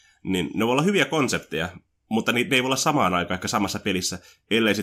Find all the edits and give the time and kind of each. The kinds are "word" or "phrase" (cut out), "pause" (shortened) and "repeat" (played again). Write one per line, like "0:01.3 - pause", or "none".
none